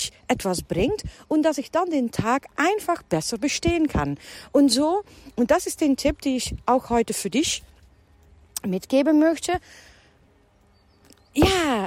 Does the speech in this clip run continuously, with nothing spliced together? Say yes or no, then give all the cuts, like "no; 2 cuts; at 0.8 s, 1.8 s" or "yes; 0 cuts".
yes; 0 cuts